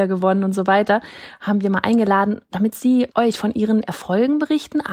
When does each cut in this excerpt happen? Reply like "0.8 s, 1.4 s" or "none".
3.1 s